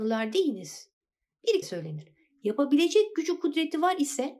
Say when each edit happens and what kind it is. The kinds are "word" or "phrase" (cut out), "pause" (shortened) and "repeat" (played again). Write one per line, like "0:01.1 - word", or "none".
0:01.6 - word